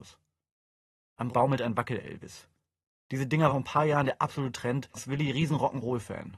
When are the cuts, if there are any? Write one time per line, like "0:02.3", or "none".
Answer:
0:01.3
0:03.5
0:04.9